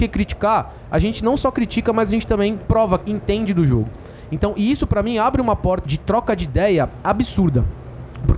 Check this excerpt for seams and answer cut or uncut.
cut